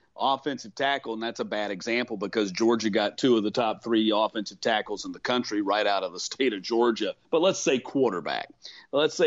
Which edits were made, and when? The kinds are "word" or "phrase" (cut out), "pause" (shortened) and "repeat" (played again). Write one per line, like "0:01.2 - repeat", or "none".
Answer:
0:07.2 - pause